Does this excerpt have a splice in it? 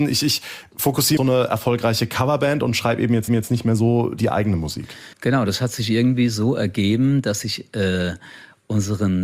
yes; 3 cuts; at 1.2 s, 3.3 s, 5.1 s

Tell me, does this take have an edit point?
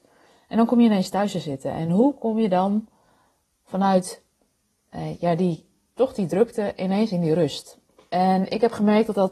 no; 0 cuts

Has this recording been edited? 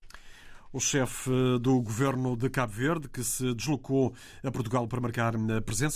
no; 0 cuts

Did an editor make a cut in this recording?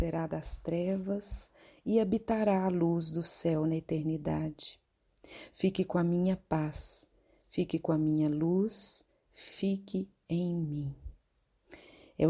no; 0 cuts

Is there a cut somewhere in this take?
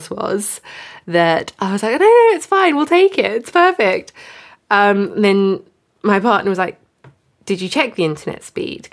no; 0 cuts

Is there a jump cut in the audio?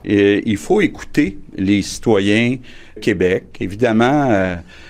yes; 1 cut; at 3.0 s

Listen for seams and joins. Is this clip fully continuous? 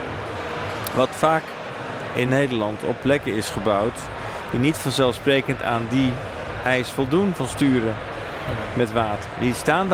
yes; 0 cuts

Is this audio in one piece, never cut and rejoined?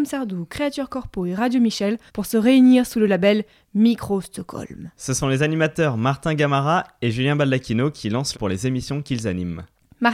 no; 2 cuts; at 2.1 s, 8.3 s

